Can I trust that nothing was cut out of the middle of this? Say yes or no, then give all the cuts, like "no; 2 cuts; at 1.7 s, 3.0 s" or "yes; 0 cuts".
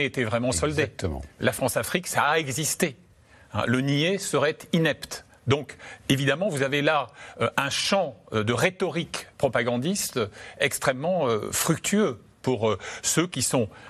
yes; 0 cuts